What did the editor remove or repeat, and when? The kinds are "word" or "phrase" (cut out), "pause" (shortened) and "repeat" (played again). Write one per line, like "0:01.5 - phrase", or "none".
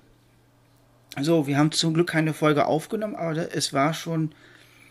none